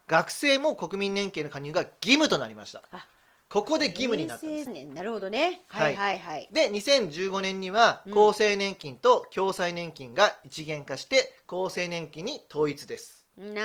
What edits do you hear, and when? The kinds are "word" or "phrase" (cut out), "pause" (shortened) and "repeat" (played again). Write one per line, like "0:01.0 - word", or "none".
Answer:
0:04.7 - word